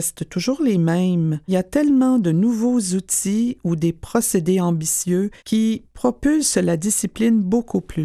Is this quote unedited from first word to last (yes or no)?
no